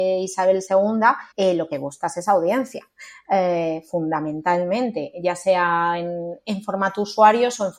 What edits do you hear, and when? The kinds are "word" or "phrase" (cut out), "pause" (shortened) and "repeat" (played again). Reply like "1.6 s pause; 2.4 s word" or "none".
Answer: 1.3 s pause